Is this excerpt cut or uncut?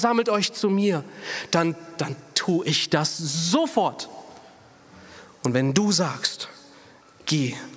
uncut